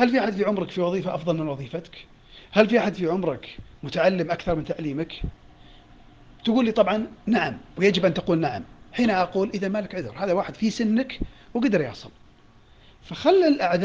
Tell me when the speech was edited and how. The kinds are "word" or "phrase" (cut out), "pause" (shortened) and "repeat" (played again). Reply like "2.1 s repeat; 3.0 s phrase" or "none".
7.2 s pause